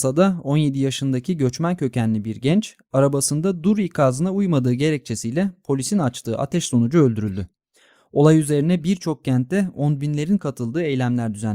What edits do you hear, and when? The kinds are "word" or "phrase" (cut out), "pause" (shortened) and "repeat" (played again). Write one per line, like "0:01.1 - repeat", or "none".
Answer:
none